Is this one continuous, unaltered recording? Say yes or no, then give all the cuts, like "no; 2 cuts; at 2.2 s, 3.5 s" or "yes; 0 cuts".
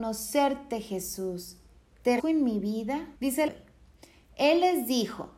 no; 3 cuts; at 2.2 s, 3.2 s, 3.5 s